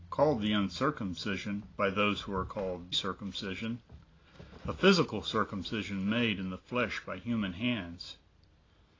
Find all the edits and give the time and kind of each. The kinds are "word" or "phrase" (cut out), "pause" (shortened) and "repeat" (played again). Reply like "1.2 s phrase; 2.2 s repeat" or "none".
2.9 s word

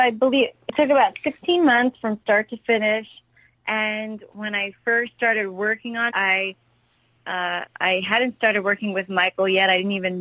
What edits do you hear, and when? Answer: 6.1 s word

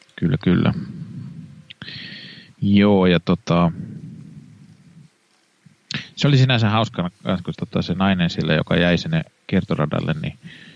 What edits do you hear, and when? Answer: 7.5 s word

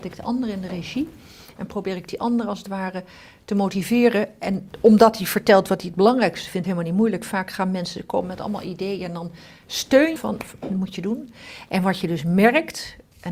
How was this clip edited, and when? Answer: 6.6 s phrase; 10.2 s phrase

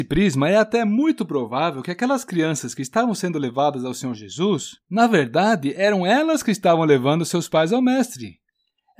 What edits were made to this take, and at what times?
4.8 s pause

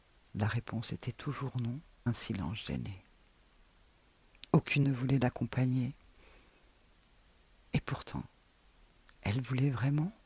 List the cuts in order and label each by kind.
2.1 s word; 4.8 s word

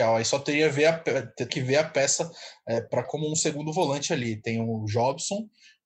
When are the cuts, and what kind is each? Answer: 1.5 s word; 3.0 s word

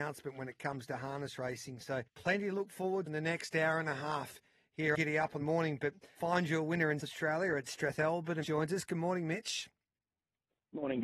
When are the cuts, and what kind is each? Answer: 2.1 s pause; 3.1 s word; 4.9 s word; 5.4 s phrase; 6.2 s word; 7.0 s word; 8.4 s phrase

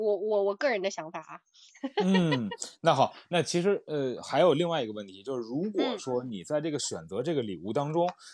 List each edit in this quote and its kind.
none

